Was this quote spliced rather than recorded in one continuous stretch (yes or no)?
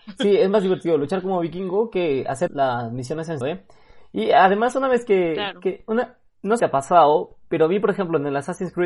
yes